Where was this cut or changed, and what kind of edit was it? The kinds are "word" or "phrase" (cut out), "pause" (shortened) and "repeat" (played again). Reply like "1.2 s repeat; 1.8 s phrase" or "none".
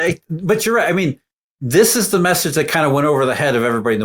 none

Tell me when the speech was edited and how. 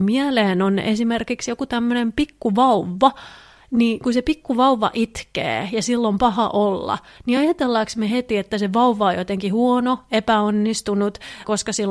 none

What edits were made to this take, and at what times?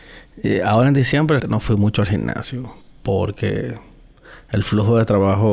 1.4 s word

